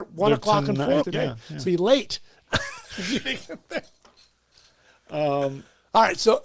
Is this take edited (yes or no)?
yes